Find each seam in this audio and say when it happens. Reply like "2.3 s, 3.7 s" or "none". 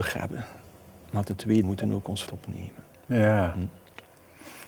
1.6 s, 2.3 s